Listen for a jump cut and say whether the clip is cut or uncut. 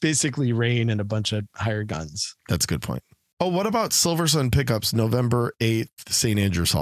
uncut